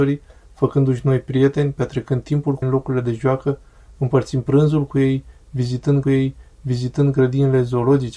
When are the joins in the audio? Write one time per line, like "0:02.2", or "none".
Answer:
0:02.6
0:06.0